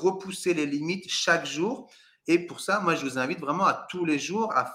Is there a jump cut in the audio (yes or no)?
no